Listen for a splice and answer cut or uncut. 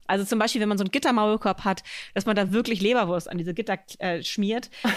uncut